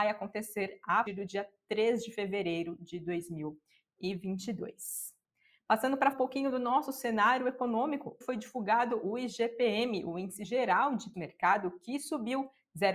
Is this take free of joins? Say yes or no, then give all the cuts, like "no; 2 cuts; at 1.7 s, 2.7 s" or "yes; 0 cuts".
no; 4 cuts; at 1.1 s, 6.1 s, 8.2 s, 11.1 s